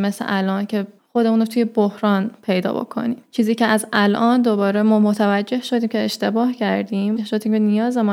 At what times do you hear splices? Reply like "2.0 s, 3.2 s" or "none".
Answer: 7.2 s